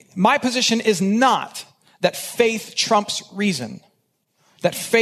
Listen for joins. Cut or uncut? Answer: uncut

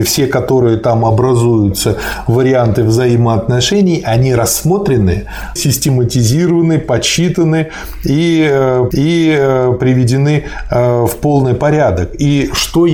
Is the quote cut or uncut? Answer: cut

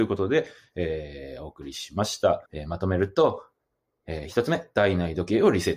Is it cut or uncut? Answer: cut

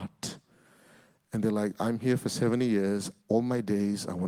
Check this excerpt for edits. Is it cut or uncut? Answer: cut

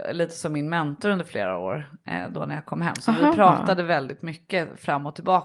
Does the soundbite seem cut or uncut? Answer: uncut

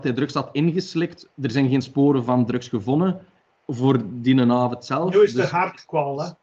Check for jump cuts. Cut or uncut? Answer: cut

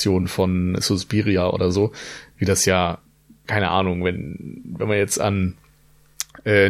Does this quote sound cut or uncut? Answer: uncut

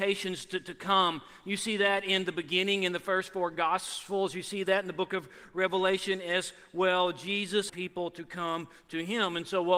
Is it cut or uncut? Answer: cut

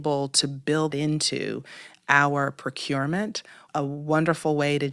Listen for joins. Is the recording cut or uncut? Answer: cut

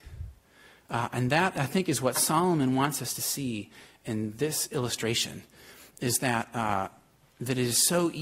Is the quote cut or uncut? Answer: uncut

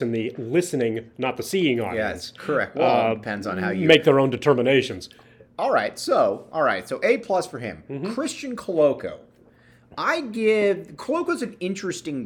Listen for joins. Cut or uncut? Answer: uncut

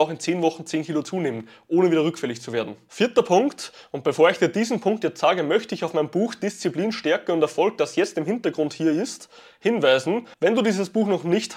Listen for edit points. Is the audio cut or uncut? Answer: cut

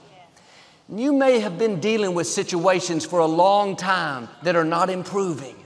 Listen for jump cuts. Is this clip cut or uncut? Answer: cut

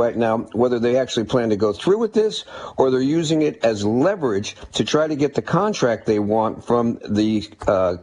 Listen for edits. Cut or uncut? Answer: uncut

